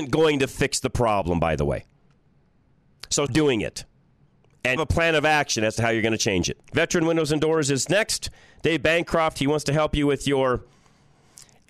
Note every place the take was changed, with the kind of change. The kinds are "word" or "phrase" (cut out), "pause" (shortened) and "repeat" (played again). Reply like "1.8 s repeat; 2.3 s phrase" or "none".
3.3 s word; 4.8 s word; 6.6 s pause